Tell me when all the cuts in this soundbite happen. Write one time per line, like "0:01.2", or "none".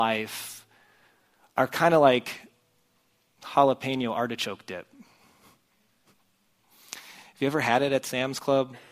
none